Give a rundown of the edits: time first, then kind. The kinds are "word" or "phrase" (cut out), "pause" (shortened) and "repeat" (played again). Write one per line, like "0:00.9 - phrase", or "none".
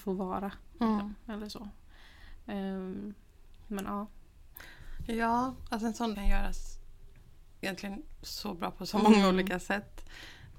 0:06.1 - word

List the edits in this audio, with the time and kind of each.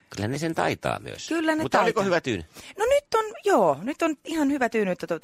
none

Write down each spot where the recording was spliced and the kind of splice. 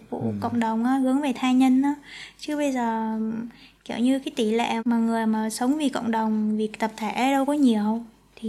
0:04.8 - word

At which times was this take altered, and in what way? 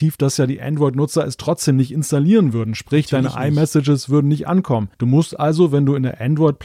0:04.9 - pause

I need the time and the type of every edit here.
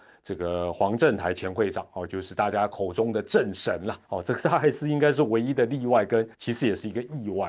0:04.1 - pause
0:06.3 - pause

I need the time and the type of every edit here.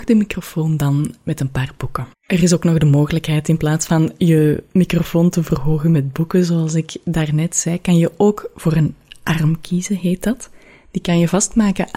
0:02.1 - pause

